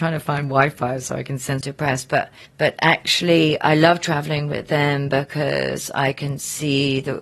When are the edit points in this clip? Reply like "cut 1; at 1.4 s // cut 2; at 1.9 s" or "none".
cut 1; at 1.6 s // cut 2; at 2.4 s